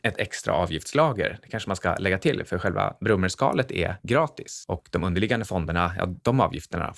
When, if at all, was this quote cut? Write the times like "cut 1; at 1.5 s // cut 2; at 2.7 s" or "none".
none

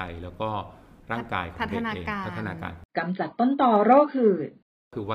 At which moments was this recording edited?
cut 1; at 2.9 s

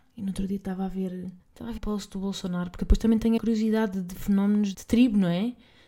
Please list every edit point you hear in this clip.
cut 1; at 1.4 s // cut 2; at 1.8 s // cut 3; at 3.4 s // cut 4; at 4.7 s

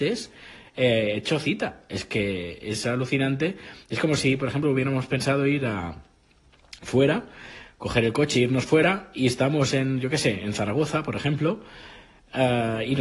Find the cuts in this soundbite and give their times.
none

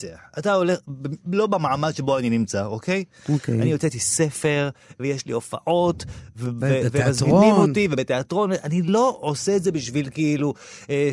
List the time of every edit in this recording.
cut 1; at 1.3 s

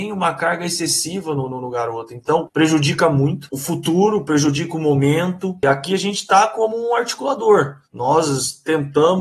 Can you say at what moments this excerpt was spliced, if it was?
cut 1; at 7.8 s

